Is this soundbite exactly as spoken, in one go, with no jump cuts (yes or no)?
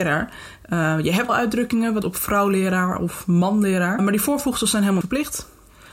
no